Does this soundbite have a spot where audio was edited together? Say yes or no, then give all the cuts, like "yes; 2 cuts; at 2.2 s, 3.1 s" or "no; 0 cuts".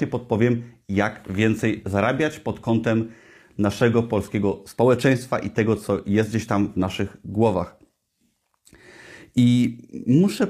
no; 0 cuts